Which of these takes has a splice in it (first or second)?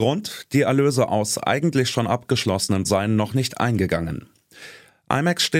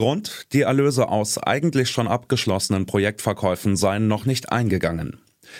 first